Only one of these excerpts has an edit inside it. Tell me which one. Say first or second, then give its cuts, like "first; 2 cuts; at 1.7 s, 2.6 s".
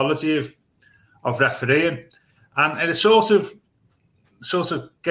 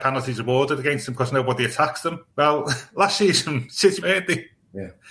second; 2 cuts; at 2.3 s, 4.0 s